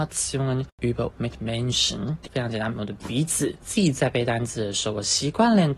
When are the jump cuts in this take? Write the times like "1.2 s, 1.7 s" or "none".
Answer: 1.1 s, 2.3 s

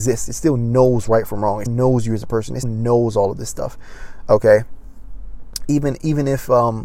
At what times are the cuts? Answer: 1.7 s, 2.6 s

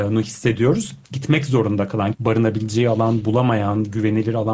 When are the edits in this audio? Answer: 1.0 s, 2.1 s

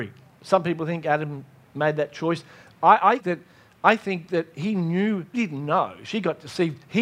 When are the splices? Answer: 3.2 s, 5.3 s

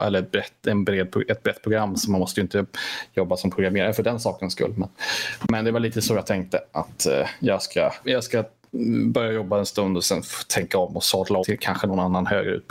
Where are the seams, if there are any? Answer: 8.0 s, 11.4 s

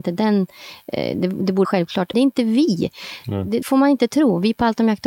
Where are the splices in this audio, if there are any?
1.6 s, 2.1 s, 3.6 s

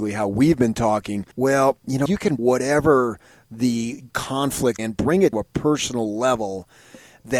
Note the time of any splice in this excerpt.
1.3 s, 2.1 s, 2.4 s, 4.1 s, 4.8 s, 5.3 s

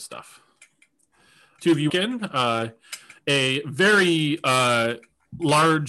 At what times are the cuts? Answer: 1.6 s, 1.9 s

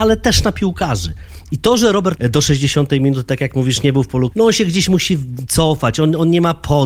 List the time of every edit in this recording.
2.2 s, 4.3 s

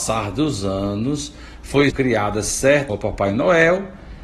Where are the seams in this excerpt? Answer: 1.9 s, 2.9 s

